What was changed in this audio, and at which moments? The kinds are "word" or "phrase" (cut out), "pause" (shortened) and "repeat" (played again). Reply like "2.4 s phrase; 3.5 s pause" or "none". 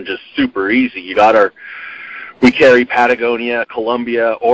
1.1 s phrase